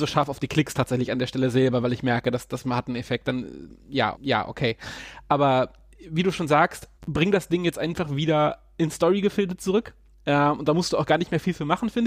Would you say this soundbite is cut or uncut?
cut